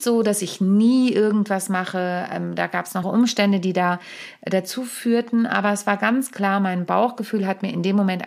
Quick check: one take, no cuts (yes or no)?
no